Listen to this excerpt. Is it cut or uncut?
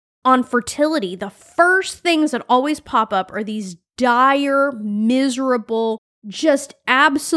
uncut